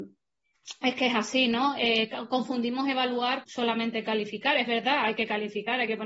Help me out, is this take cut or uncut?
cut